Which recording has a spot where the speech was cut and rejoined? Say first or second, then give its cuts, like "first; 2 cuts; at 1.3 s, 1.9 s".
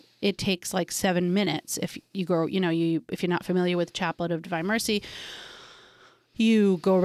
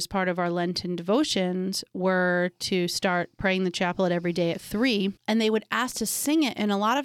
second; 1 cut; at 5.2 s